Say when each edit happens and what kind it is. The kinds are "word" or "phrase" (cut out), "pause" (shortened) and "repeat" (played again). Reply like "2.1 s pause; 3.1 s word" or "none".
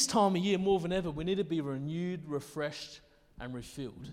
none